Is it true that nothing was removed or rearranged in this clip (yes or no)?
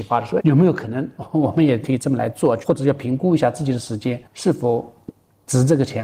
no